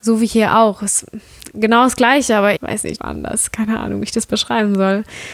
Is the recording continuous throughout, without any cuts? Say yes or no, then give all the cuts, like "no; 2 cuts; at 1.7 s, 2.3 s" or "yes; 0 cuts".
no; 2 cuts; at 2.6 s, 3.0 s